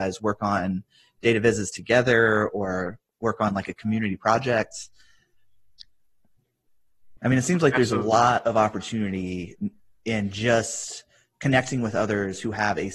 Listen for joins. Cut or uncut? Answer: uncut